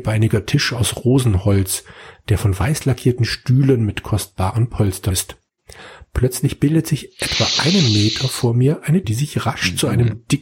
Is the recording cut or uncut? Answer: cut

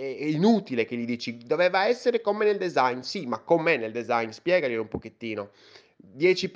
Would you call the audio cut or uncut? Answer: uncut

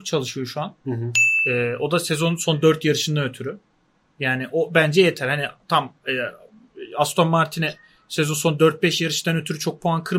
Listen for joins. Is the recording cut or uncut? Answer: uncut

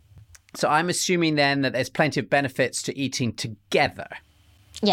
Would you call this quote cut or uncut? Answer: uncut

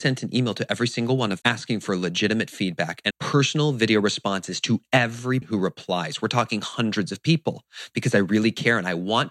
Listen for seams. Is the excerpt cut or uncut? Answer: cut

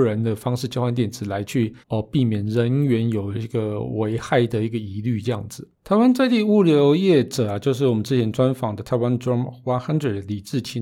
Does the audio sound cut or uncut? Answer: cut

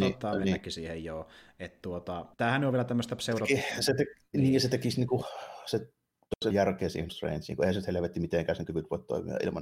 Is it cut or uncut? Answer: cut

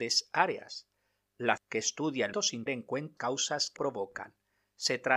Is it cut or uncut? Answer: cut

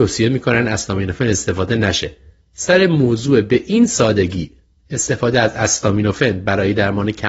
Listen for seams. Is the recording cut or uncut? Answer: uncut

